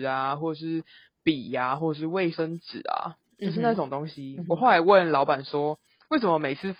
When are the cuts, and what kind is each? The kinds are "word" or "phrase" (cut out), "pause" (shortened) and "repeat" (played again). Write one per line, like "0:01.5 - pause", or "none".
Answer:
none